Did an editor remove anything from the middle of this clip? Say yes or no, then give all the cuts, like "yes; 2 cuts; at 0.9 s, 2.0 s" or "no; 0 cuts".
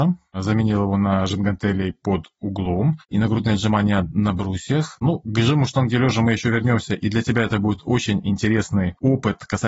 no; 0 cuts